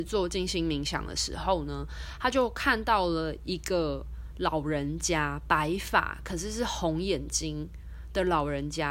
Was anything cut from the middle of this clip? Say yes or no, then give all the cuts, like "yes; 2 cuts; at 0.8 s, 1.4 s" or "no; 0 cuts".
no; 0 cuts